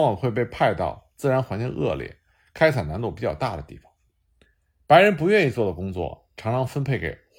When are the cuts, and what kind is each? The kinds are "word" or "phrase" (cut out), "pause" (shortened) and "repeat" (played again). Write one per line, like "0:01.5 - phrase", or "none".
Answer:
none